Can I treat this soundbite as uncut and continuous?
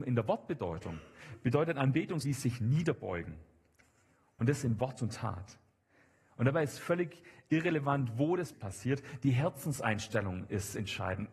no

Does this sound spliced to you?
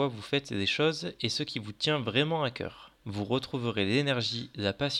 yes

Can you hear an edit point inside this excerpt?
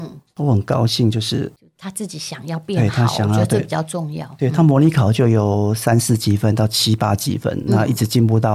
no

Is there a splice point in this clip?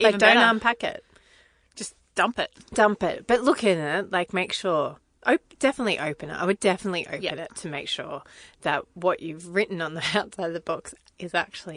no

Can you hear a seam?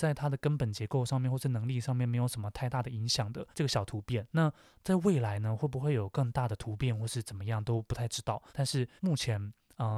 yes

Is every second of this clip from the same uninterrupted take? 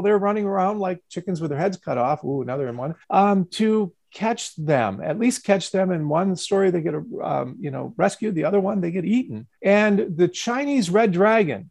no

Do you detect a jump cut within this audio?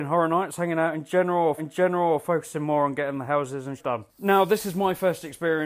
yes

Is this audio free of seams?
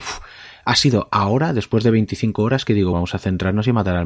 no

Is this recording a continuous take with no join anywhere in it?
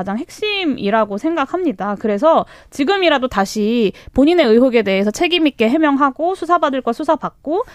yes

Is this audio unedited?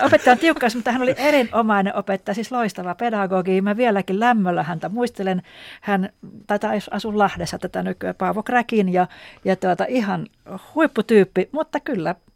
no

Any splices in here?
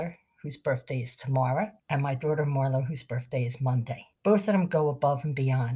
yes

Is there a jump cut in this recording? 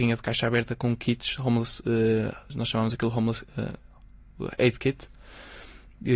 no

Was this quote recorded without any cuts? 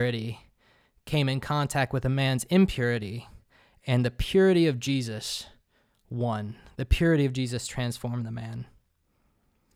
yes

